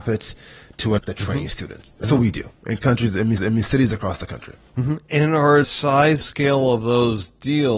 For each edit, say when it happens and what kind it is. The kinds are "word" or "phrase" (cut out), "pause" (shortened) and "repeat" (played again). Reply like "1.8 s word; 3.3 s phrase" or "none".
1.0 s word; 2.0 s word; 3.4 s repeat; 5.6 s word; 6.2 s word